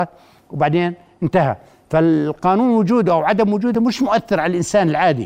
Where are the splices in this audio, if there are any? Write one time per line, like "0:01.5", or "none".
none

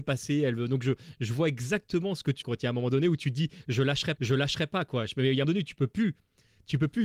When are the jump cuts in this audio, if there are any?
0:02.4
0:04.2
0:05.4

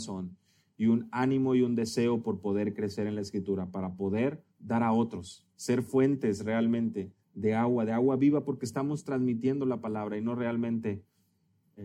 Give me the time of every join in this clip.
0:04.5
0:05.5
0:07.2

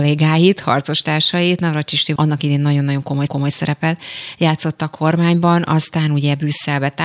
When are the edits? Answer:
0:02.2
0:03.3

